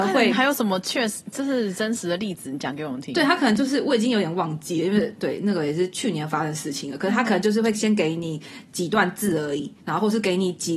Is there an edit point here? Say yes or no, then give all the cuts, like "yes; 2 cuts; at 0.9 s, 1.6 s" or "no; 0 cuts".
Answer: yes; 1 cut; at 9.8 s